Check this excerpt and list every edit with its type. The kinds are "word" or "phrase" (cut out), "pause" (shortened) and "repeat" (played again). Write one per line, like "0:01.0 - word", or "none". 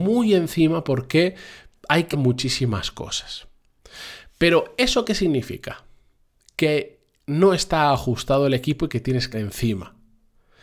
0:02.1 - word
0:09.3 - word